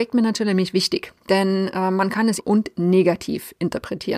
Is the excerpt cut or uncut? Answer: cut